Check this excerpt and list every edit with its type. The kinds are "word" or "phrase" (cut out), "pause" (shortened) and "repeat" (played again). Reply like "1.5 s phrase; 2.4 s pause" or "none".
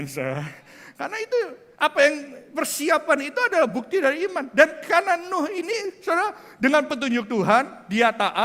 1.7 s pause